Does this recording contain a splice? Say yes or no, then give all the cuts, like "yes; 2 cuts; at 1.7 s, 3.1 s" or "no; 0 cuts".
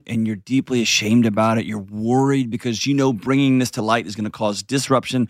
no; 0 cuts